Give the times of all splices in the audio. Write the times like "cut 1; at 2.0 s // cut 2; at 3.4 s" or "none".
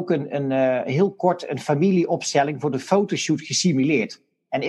none